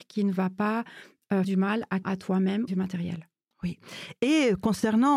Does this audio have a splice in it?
yes; 3 cuts; at 1.4 s, 2.0 s, 2.7 s

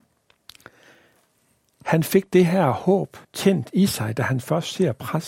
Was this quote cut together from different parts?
yes; 1 cut; at 3.2 s

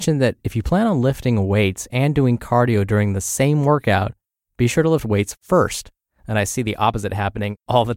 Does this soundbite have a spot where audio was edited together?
no; 0 cuts

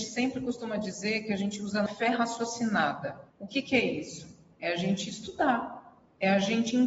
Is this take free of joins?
no; 2 cuts; at 1.9 s, 3.3 s

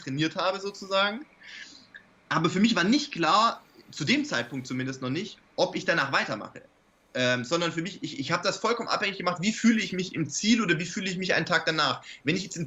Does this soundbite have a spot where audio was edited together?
no; 0 cuts

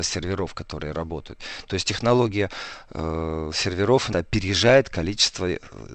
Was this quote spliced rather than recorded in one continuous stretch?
yes; 1 cut; at 4.1 s

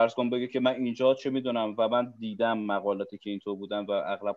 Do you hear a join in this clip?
no; 0 cuts

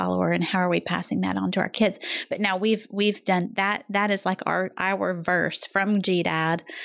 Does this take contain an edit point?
no; 0 cuts

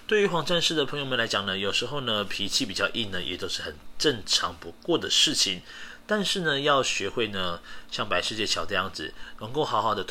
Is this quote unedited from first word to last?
yes; 0 cuts

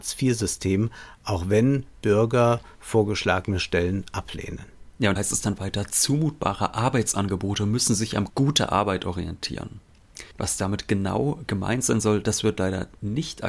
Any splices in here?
yes; 4 cuts; at 2.7 s, 5.2 s, 8.3 s, 10.3 s

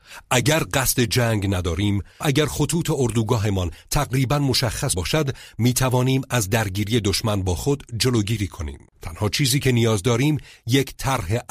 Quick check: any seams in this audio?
yes; 3 cuts; at 2.2 s, 4.9 s, 8.9 s

